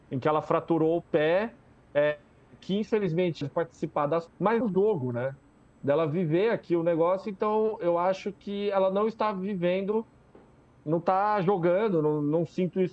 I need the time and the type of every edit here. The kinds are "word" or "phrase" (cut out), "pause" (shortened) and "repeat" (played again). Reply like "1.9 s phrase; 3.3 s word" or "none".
3.4 s phrase; 4.3 s phrase; 4.6 s phrase